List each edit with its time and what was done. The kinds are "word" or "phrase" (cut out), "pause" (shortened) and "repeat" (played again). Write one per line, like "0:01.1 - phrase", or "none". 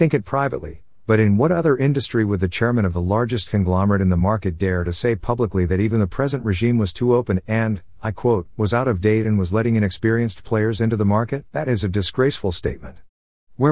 0:11.5 - pause